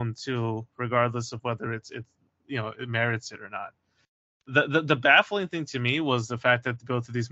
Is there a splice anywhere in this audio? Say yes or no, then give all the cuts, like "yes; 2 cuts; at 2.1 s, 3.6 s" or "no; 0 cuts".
no; 0 cuts